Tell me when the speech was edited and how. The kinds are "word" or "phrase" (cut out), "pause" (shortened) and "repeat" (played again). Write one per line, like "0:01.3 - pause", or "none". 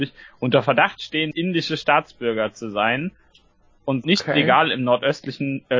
0:01.3 - word
0:04.0 - word